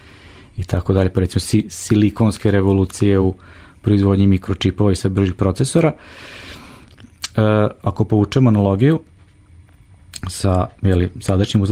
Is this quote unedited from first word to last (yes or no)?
yes